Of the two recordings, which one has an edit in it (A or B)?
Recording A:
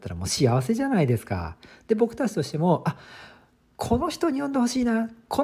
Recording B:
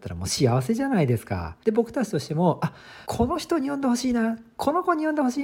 B